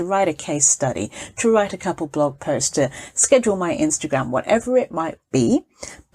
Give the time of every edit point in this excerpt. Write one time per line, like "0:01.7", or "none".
none